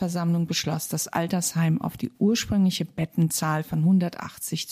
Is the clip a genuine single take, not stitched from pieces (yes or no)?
yes